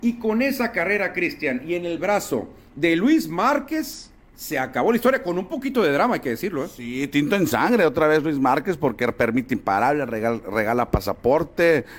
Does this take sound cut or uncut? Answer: uncut